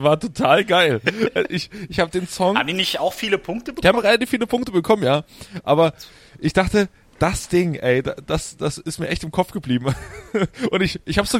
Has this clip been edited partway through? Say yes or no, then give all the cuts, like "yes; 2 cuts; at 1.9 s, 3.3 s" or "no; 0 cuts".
no; 0 cuts